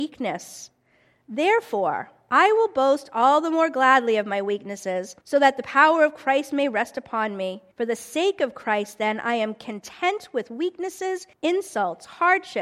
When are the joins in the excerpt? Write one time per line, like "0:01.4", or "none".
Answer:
0:05.2
0:07.7
0:11.3

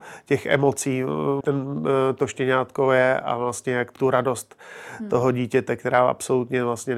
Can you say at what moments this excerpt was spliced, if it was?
0:01.4
0:04.0

